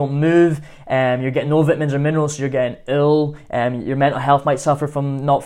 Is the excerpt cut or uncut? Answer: uncut